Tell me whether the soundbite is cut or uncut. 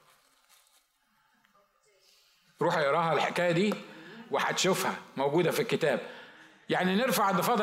uncut